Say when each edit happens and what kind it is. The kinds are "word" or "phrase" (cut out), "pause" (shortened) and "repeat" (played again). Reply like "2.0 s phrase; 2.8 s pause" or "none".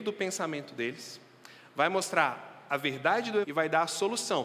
3.4 s word